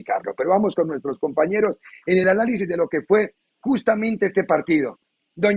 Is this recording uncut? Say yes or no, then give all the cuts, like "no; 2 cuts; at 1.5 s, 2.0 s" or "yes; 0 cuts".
yes; 0 cuts